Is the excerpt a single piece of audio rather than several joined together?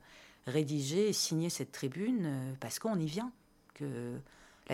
yes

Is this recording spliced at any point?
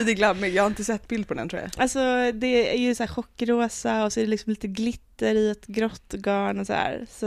no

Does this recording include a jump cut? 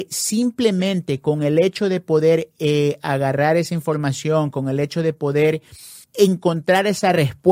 yes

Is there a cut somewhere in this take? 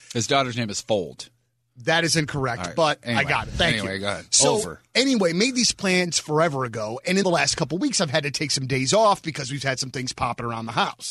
yes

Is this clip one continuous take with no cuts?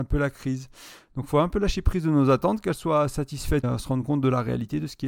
no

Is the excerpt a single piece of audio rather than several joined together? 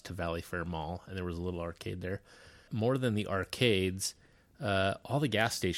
no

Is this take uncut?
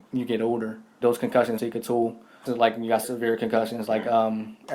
no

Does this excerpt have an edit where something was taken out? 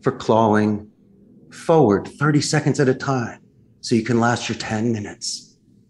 no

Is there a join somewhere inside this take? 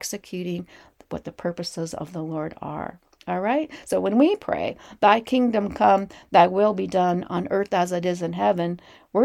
no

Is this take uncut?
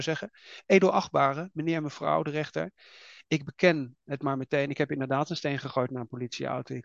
yes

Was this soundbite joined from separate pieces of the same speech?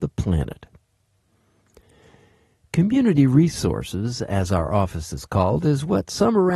no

